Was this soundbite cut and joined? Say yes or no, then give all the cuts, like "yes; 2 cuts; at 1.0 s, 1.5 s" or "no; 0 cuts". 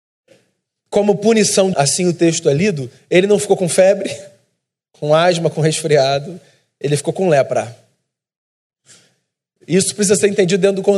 yes; 1 cut; at 1.7 s